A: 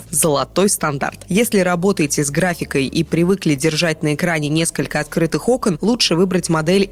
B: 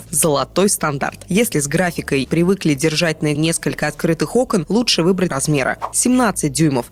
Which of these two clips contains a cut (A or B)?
B